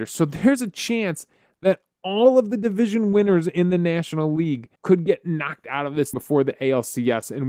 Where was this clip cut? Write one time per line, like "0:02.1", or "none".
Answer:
0:04.8
0:06.1